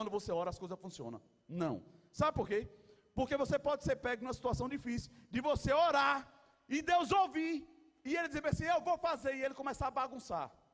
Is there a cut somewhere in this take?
no; 0 cuts

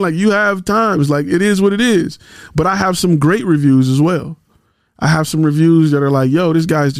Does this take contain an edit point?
no; 0 cuts

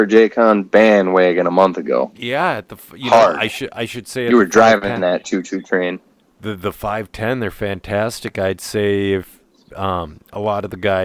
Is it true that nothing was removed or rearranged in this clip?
yes; 0 cuts

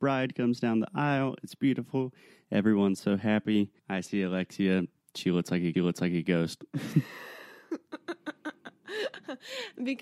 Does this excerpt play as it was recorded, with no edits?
no; 2 cuts; at 3.8 s, 5.7 s

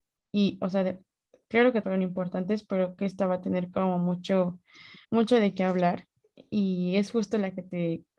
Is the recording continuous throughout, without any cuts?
no; 4 cuts; at 1.8 s, 3.0 s, 5.0 s, 6.2 s

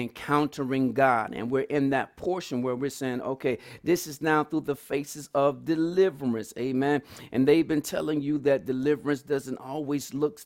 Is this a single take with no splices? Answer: yes; 0 cuts

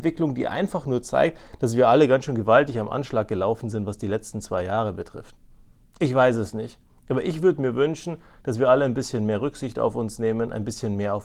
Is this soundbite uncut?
yes; 0 cuts

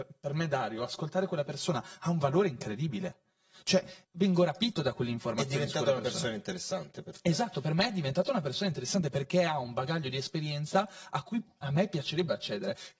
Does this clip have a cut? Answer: yes; 1 cut; at 4.0 s

